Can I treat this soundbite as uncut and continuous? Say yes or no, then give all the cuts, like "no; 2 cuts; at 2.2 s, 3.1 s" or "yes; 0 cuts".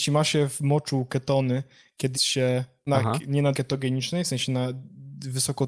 no; 3 cuts; at 2.1 s, 2.9 s, 3.5 s